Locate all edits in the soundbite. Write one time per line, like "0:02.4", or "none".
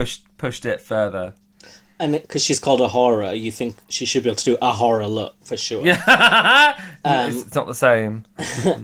0:05.4